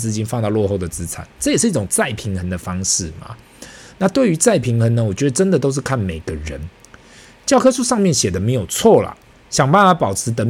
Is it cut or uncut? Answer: uncut